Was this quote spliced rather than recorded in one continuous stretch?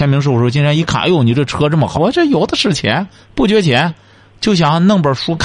yes; 1 cut; at 2.0 s

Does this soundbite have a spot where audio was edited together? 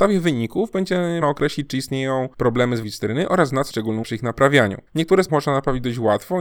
yes; 7 cuts; at 1.2 s, 2.3 s, 2.8 s, 3.7 s, 4.0 s, 4.9 s, 5.3 s

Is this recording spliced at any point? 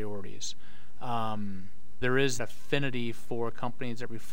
yes; 2 cuts; at 2.0 s, 2.4 s

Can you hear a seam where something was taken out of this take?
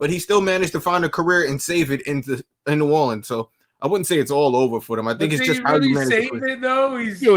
no; 0 cuts

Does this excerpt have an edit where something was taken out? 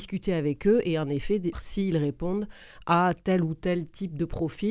yes; 1 cut; at 1.5 s

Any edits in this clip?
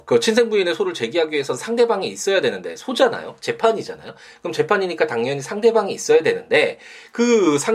no; 0 cuts

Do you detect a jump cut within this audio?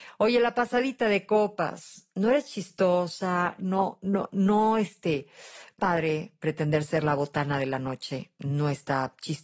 yes; 1 cut; at 5.8 s

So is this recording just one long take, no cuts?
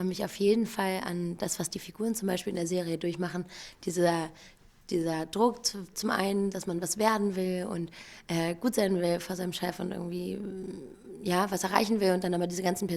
yes; 0 cuts

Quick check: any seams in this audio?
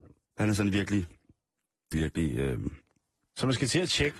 yes; 1 cut; at 1.9 s

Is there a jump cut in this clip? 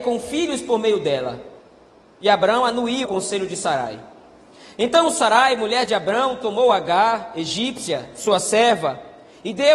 yes; 1 cut; at 3.0 s

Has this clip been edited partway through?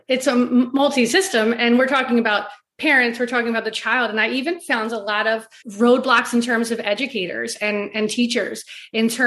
yes; 1 cut; at 5.6 s

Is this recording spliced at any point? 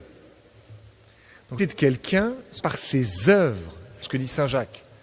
yes; 3 cuts; at 1.6 s, 2.6 s, 4.0 s

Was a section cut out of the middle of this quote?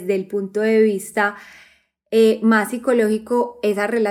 no; 0 cuts

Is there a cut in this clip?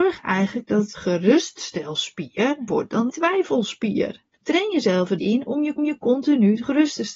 yes; 6 cuts; at 0.9 s, 2.7 s, 3.1 s, 4.3 s, 5.2 s, 5.8 s

